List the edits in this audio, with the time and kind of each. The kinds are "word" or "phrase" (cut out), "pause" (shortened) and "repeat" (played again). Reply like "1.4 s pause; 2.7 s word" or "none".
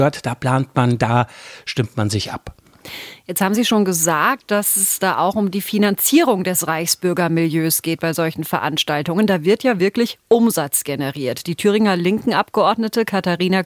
none